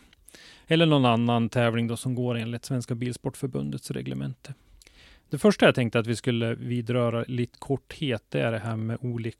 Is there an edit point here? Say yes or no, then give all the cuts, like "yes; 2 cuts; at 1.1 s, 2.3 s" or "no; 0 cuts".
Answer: yes; 2 cuts; at 4.8 s, 7.5 s